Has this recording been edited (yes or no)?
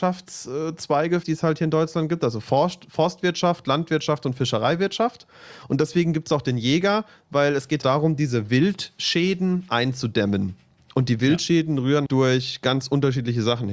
yes